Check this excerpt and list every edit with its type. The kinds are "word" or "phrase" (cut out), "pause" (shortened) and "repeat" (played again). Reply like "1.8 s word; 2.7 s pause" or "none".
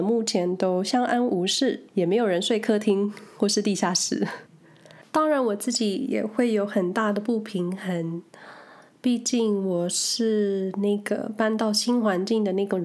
1.9 s pause; 4.5 s pause

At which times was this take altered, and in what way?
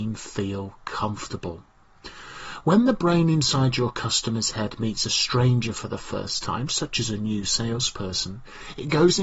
none

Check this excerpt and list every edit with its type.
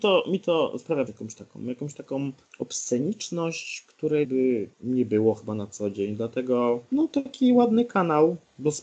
1.1 s word; 4.2 s word; 4.7 s pause

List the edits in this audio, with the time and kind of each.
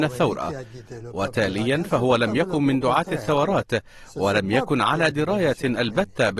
none

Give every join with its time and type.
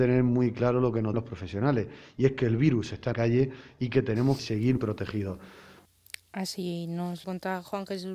1.1 s word; 3.1 s word; 4.4 s word; 4.8 s word; 7.2 s word

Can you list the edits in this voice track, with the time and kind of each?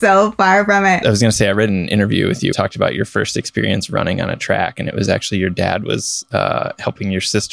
2.5 s phrase

